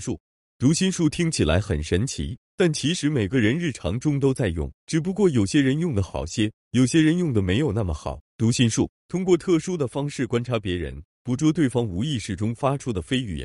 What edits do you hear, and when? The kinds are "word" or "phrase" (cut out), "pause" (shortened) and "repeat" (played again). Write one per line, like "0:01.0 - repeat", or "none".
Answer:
0:04.8 - pause
0:08.3 - pause